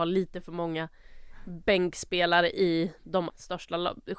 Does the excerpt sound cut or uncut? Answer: cut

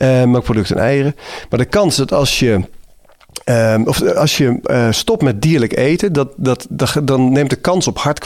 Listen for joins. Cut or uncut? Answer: uncut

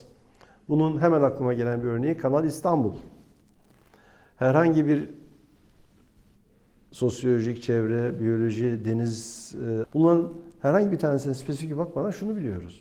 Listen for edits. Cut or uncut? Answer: cut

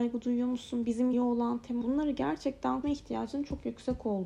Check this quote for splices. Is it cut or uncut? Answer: cut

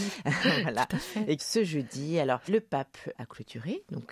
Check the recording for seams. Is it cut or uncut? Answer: cut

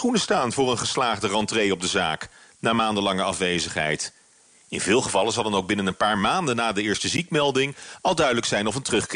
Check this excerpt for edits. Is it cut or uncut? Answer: uncut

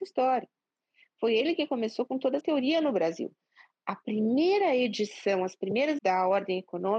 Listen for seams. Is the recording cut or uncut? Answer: cut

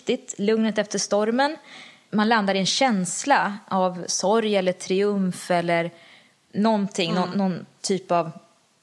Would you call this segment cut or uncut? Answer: uncut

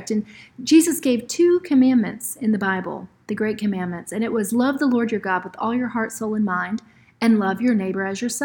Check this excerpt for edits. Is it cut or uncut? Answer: uncut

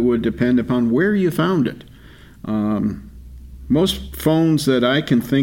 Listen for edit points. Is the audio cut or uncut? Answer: uncut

